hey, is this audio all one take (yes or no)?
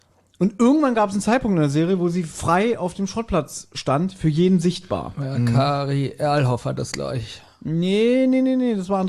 yes